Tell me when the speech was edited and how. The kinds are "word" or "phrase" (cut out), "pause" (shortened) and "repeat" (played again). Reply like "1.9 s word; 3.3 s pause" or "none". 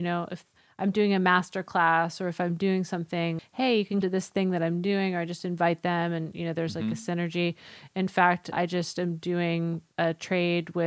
3.4 s word; 4.0 s word; 8.5 s word